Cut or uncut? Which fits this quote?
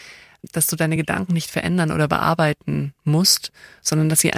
uncut